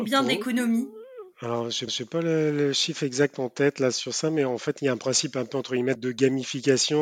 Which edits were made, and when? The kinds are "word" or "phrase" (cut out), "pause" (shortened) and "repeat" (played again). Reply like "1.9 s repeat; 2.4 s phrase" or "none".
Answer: 1.9 s repeat; 6.0 s word

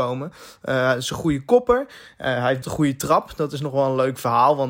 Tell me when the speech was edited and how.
2.6 s word

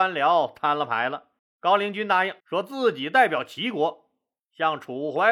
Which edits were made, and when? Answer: 1.4 s pause; 2.4 s pause

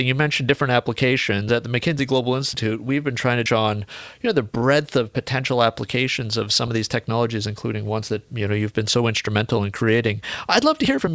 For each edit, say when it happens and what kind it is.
3.5 s phrase; 8.3 s word

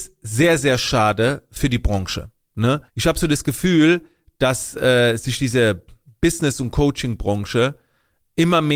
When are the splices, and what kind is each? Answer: 2.9 s pause

